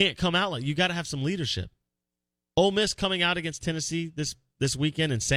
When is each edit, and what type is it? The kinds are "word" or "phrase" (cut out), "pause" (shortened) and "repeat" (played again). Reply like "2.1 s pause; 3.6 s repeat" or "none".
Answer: none